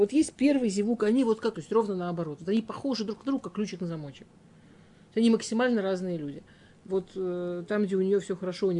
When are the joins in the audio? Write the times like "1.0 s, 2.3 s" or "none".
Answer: 1.5 s, 6.9 s